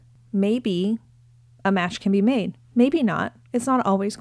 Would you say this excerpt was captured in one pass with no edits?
yes; 0 cuts

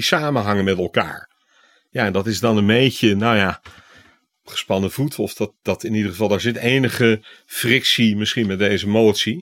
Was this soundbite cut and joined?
no; 0 cuts

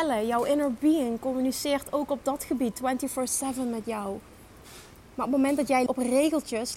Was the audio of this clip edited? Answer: yes; 1 cut; at 5.9 s

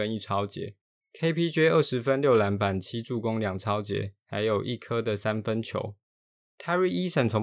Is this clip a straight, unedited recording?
no; 2 cuts; at 1.0 s, 6.4 s

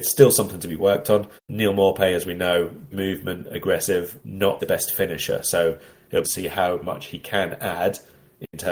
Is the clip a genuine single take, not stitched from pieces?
no; 5 cuts; at 1.4 s, 2.9 s, 4.2 s, 4.6 s, 6.2 s

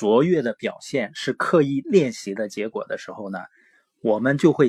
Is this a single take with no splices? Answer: yes; 0 cuts

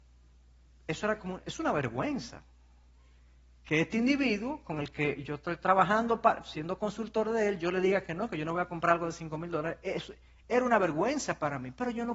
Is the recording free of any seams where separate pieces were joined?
yes; 0 cuts

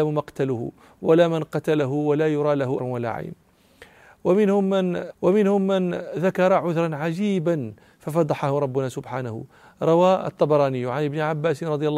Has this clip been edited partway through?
yes; 2 cuts; at 2.8 s, 5.1 s

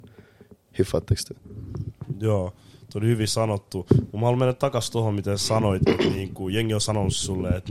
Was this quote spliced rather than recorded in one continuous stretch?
no; 0 cuts

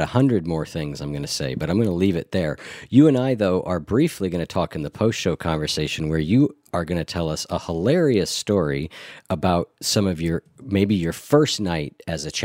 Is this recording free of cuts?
yes; 0 cuts

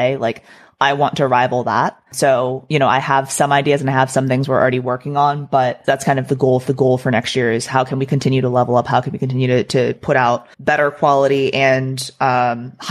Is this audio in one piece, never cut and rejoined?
no; 4 cuts; at 2.1 s, 5.8 s, 6.7 s, 10.5 s

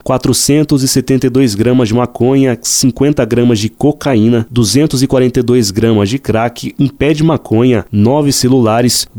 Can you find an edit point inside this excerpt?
no; 0 cuts

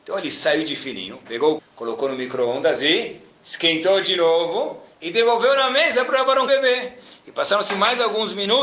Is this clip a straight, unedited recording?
no; 3 cuts; at 1.6 s, 4.9 s, 6.5 s

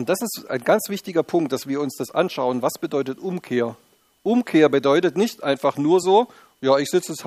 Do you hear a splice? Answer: no; 0 cuts

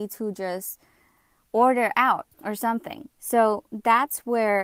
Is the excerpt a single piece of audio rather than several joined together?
no; 2 cuts; at 2.3 s, 3.1 s

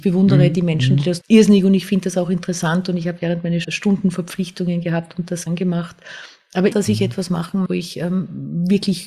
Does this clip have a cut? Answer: yes; 5 cuts; at 1.2 s, 3.6 s, 5.5 s, 6.7 s, 7.7 s

